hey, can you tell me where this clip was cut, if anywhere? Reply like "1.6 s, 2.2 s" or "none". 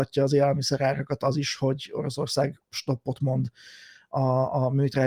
none